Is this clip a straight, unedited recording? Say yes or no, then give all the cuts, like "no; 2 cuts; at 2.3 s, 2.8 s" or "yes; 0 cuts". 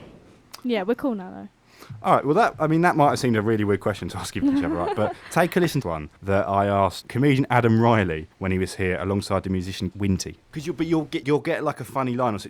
no; 7 cuts; at 4.4 s, 5.8 s, 6.2 s, 7.0 s, 8.3 s, 9.9 s, 11.2 s